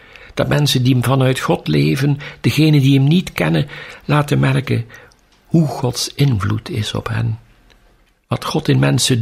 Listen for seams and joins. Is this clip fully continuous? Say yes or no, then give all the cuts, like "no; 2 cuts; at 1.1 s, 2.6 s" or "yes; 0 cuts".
yes; 0 cuts